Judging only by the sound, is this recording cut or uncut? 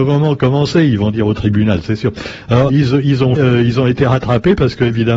cut